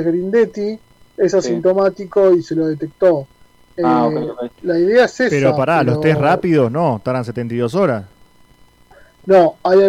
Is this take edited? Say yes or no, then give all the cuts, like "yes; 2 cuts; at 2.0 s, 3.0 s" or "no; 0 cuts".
no; 0 cuts